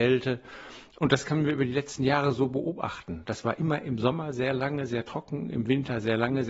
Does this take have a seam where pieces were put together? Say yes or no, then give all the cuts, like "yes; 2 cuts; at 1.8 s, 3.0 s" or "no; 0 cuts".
no; 0 cuts